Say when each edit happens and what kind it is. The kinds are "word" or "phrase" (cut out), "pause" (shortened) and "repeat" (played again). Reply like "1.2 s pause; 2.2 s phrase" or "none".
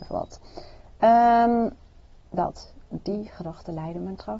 2.2 s pause